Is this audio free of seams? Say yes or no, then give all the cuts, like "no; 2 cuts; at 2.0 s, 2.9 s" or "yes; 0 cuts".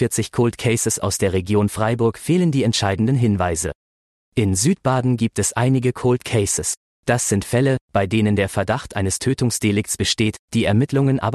yes; 0 cuts